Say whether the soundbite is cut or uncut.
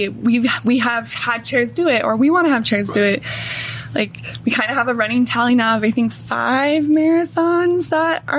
uncut